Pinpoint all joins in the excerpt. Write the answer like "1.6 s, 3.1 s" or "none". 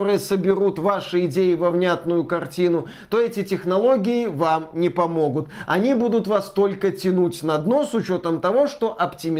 none